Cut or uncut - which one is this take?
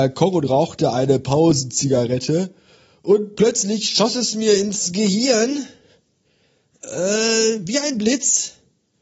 uncut